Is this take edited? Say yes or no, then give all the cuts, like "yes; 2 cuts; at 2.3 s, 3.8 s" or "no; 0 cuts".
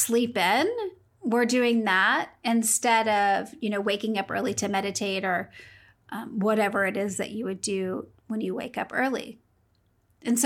no; 0 cuts